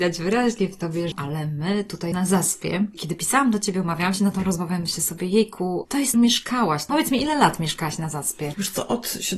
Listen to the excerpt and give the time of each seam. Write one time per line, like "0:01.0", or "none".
0:02.1
0:06.1